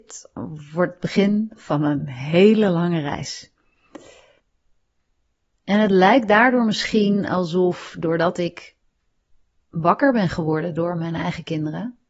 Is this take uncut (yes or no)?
yes